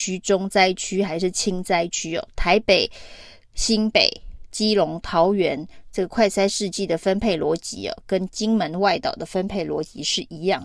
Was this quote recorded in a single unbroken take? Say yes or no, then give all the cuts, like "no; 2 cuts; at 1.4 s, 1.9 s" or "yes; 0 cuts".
yes; 0 cuts